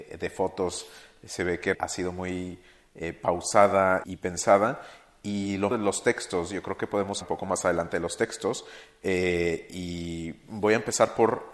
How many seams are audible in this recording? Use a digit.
4